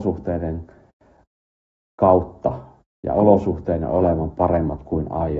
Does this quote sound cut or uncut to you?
uncut